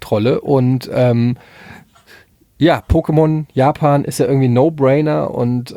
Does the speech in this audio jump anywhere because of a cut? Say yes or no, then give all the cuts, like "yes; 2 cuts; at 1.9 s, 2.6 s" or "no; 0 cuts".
no; 0 cuts